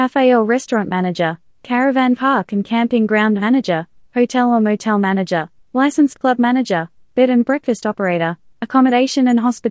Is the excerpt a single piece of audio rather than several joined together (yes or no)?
yes